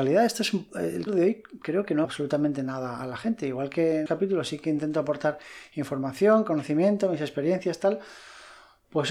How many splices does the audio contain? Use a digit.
3